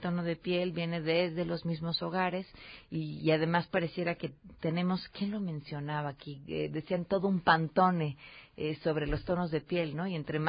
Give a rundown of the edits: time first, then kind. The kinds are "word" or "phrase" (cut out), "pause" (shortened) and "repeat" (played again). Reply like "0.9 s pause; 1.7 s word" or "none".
none